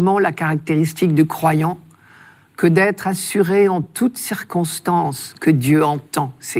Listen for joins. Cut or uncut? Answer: uncut